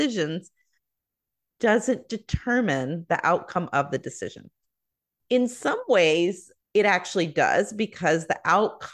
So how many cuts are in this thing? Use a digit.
1